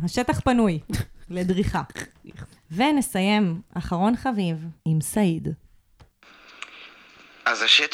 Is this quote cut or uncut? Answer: cut